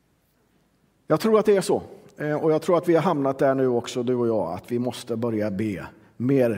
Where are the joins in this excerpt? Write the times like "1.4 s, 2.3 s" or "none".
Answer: none